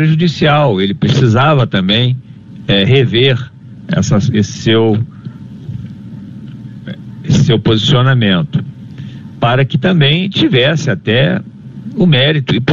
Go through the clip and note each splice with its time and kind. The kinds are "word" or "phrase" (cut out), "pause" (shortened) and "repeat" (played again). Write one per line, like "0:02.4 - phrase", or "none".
none